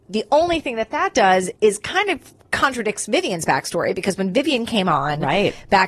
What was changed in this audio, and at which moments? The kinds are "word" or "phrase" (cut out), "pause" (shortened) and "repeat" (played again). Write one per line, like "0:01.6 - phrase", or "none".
0:01.6 - pause